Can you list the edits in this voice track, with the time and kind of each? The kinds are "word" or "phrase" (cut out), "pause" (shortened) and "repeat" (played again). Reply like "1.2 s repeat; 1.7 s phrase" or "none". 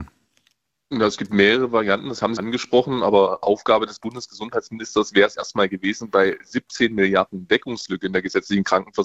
2.4 s word; 5.3 s word